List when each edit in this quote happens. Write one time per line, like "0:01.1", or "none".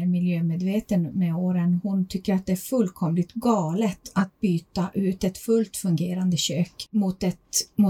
none